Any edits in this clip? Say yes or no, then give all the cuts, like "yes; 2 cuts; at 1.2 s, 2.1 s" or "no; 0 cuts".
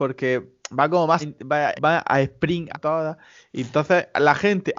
yes; 3 cuts; at 1.2 s, 1.8 s, 2.7 s